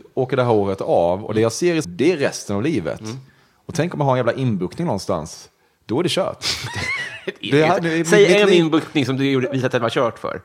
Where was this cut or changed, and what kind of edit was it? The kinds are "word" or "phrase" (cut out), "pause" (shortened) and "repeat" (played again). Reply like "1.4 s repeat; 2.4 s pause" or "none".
1.8 s phrase